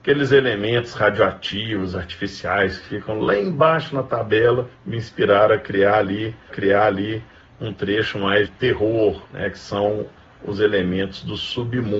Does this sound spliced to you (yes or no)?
yes